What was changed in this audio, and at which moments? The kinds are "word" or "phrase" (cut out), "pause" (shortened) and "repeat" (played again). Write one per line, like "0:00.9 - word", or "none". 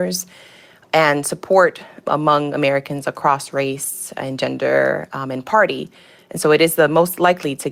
none

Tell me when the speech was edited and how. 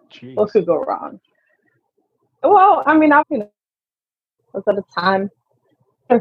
0:03.2 - word
0:04.4 - word

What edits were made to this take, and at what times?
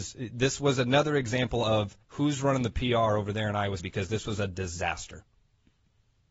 0:02.0 - pause
0:03.8 - word

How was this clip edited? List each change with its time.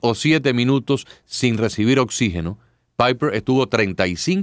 none

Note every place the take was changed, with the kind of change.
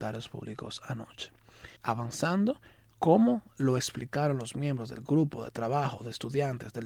0:01.8 - pause

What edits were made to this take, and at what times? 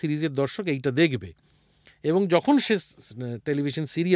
none

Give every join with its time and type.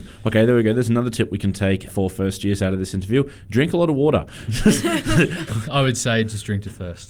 0:01.9 - word
0:05.5 - word

